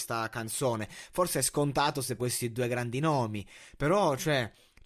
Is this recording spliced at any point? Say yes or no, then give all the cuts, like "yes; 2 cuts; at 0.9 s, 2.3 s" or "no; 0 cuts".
yes; 1 cut; at 2.2 s